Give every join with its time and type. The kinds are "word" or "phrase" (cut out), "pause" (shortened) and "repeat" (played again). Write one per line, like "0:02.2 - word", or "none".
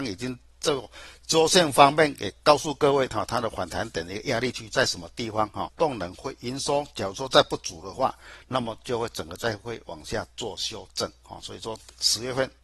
0:05.7 - word